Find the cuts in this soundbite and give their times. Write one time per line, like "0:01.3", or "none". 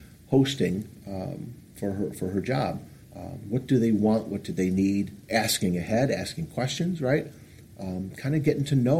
0:03.0